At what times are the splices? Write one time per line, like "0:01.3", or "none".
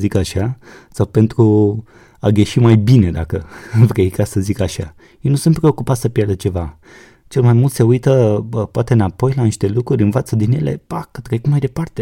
none